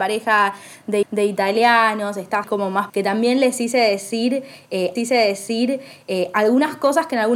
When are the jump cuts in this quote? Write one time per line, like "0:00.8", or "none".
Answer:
0:01.0
0:02.4
0:02.9
0:05.0